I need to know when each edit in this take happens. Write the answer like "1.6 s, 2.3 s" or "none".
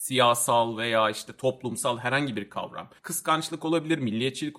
3.0 s